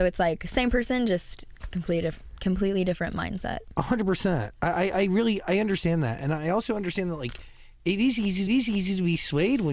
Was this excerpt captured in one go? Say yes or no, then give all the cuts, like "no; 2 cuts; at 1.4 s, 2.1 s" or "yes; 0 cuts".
no; 1 cut; at 8.5 s